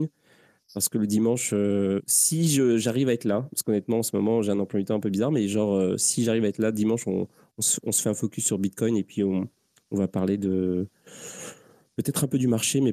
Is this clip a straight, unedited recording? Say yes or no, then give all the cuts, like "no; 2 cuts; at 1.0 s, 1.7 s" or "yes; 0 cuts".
yes; 0 cuts